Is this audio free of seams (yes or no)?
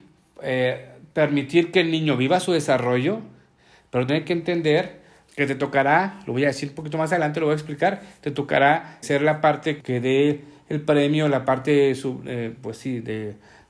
no